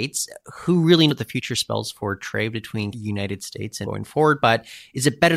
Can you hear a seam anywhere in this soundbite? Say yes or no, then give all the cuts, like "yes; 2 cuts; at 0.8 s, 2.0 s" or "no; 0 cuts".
yes; 3 cuts; at 1.1 s, 2.9 s, 3.8 s